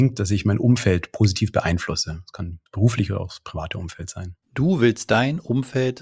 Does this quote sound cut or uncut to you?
cut